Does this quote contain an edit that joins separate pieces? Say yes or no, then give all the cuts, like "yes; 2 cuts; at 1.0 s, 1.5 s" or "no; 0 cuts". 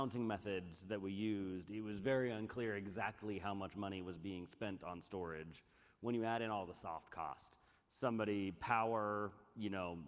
no; 0 cuts